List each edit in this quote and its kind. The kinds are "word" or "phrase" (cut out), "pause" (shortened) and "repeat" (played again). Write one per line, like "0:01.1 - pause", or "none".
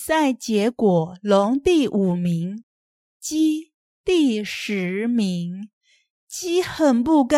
none